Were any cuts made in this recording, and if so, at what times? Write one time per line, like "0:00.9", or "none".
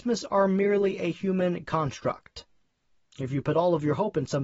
none